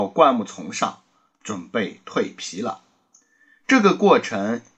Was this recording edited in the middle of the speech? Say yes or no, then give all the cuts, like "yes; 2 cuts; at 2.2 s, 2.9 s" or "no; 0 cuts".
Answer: no; 0 cuts